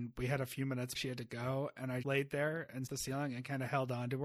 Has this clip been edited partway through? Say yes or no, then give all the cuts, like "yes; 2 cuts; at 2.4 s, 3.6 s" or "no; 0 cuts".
yes; 3 cuts; at 0.9 s, 2.0 s, 2.9 s